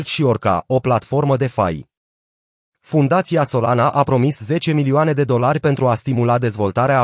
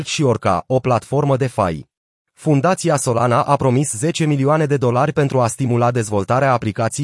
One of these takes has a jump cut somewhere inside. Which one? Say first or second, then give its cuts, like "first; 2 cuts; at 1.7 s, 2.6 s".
second; 1 cut; at 2.0 s